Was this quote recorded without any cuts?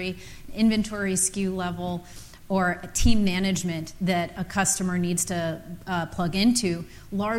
yes; 0 cuts

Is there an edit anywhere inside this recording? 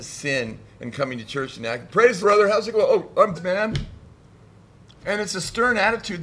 yes; 3 cuts; at 2.2 s, 3.3 s, 5.0 s

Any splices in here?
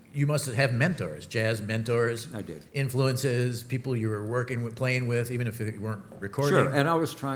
yes; 1 cut; at 2.7 s

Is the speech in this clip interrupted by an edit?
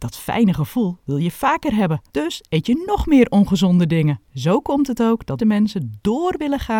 yes; 3 cuts; at 2.1 s, 4.2 s, 5.4 s

